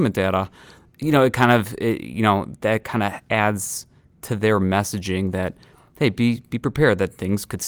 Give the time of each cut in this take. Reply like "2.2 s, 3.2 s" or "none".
none

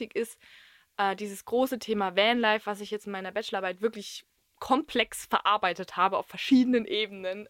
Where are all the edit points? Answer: none

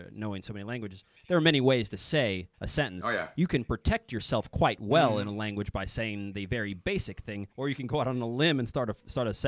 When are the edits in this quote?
2.5 s, 7.5 s

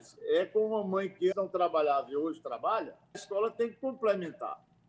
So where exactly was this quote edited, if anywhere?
1.3 s, 3.1 s

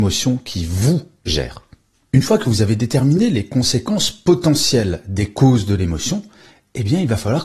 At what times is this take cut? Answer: none

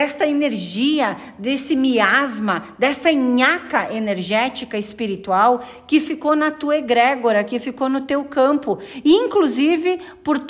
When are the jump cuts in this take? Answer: none

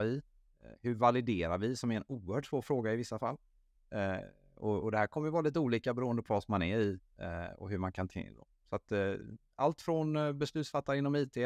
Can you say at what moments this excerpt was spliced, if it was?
4.8 s, 6.3 s, 8.1 s

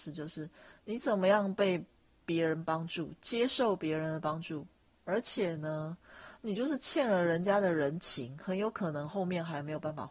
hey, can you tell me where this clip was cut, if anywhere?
none

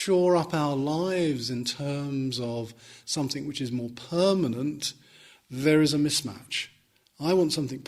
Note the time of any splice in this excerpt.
none

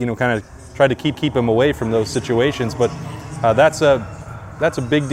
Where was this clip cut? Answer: 1.1 s

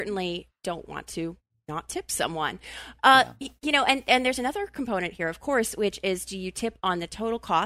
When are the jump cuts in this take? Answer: none

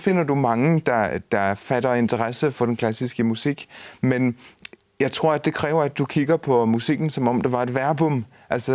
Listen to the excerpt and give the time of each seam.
2.5 s

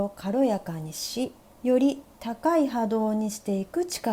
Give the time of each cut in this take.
1.4 s

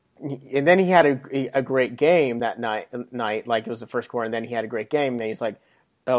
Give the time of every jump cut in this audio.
none

